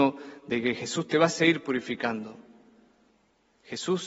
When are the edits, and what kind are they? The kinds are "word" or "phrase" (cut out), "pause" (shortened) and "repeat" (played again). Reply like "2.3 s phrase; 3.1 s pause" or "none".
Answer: none